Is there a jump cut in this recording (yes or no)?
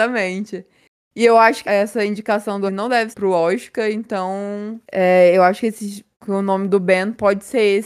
yes